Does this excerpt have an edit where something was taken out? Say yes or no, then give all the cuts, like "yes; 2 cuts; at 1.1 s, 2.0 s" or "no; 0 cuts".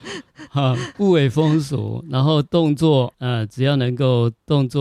yes; 2 cuts; at 0.9 s, 3.1 s